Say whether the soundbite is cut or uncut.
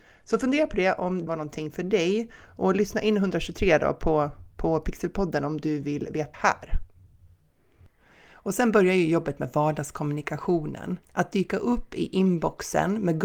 cut